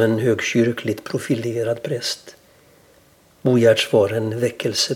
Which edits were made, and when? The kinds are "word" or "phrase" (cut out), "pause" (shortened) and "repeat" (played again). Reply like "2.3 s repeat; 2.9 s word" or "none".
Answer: none

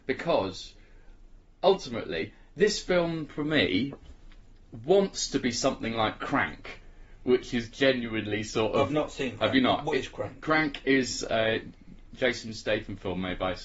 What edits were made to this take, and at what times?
none

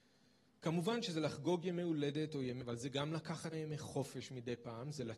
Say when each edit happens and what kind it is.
2.6 s word; 3.5 s word

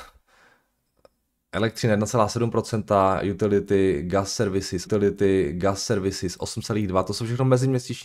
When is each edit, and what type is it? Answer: 4.9 s repeat

